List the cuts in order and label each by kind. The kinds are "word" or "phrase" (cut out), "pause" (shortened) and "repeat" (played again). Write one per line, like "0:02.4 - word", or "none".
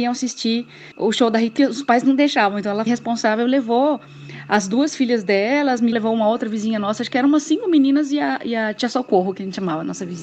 0:00.9 - pause
0:01.6 - phrase
0:02.9 - word
0:05.9 - word